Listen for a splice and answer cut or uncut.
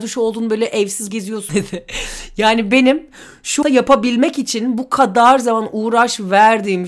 cut